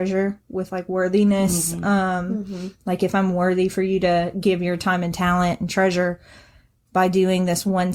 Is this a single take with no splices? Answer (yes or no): yes